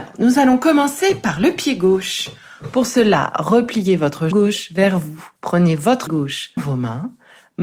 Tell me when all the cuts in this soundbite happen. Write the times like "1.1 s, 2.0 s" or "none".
4.3 s, 5.4 s, 6.1 s, 6.6 s